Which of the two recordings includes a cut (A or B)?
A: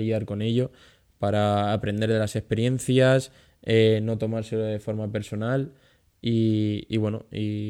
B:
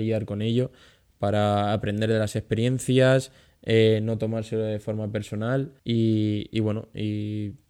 B